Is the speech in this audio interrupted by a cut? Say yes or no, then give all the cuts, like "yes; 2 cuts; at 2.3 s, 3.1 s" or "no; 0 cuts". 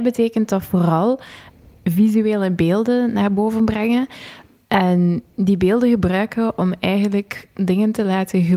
no; 0 cuts